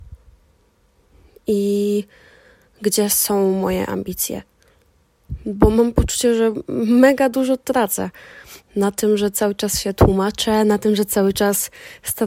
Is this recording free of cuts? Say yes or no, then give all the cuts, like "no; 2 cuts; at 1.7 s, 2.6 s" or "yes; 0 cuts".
yes; 0 cuts